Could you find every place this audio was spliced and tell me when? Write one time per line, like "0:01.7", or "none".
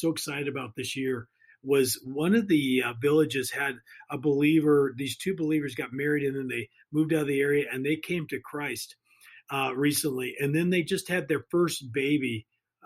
none